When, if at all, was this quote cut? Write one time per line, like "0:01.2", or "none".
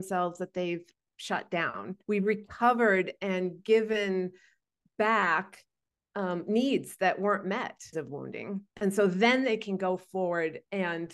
0:02.0
0:07.9
0:08.7